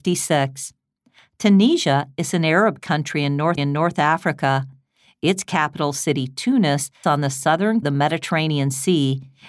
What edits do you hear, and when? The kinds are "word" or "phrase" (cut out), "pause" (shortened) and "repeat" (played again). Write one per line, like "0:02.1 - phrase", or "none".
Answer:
0:03.6 - repeat
0:07.0 - word
0:07.8 - phrase